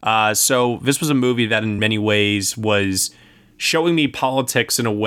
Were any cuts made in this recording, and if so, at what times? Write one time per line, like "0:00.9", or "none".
none